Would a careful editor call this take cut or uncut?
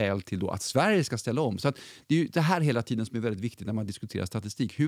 uncut